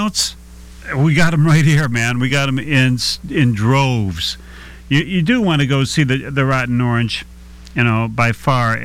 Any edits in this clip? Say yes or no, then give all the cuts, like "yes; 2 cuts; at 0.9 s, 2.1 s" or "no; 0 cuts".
no; 0 cuts